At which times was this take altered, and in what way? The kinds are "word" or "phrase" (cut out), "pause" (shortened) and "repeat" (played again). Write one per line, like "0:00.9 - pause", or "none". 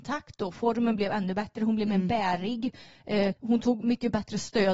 0:03.4 - pause